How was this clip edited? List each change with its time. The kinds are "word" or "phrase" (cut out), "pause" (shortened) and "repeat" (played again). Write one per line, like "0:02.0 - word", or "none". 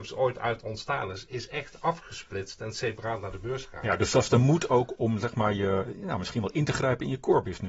none